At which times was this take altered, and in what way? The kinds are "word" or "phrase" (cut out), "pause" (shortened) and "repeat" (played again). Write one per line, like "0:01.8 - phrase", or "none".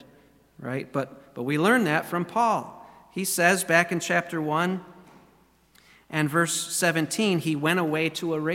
none

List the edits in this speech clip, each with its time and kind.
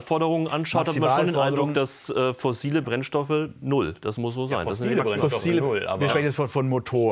none

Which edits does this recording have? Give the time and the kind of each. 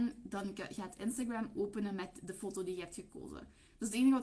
none

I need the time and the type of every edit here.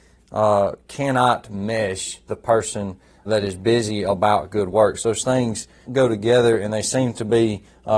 0:02.3 - word
0:03.3 - word
0:05.9 - word

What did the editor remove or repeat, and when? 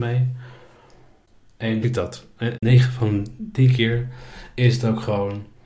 0:01.8 - phrase
0:02.5 - word

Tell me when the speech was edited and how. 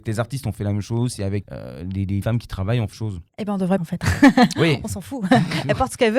0:01.4 - word
0:02.2 - word
0:02.9 - phrase
0:03.3 - pause
0:03.8 - phrase

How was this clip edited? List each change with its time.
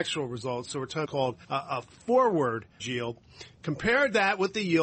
0:01.0 - phrase
0:01.4 - pause
0:02.8 - word

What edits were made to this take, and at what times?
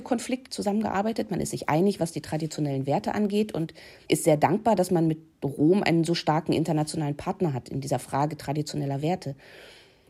none

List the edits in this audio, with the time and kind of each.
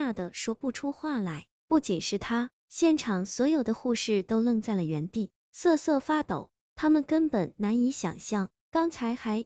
0:02.6 - pause

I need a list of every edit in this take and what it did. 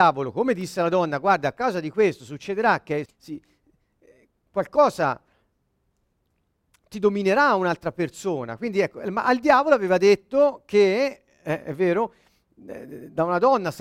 0:03.1 - word

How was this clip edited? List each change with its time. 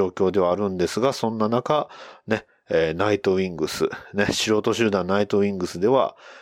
none

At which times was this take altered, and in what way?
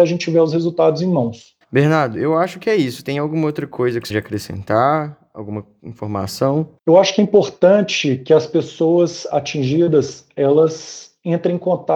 0:01.6 - pause
0:04.1 - word
0:06.8 - pause

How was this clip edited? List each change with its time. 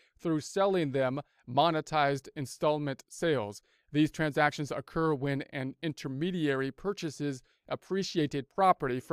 none

